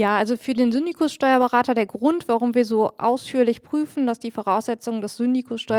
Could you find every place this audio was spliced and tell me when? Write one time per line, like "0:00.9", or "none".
none